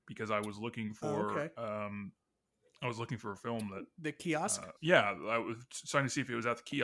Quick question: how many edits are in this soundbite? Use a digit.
1